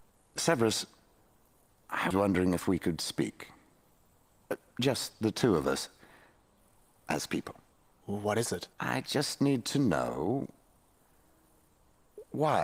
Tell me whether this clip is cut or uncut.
cut